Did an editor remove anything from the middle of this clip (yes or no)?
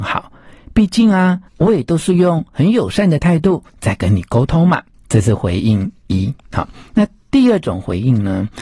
yes